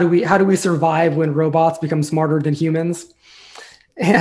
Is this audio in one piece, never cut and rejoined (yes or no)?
yes